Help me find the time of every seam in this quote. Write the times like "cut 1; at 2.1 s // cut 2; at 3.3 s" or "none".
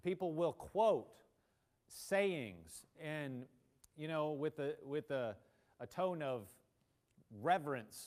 cut 1; at 2.9 s